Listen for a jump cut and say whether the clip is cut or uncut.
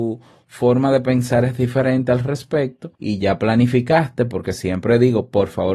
cut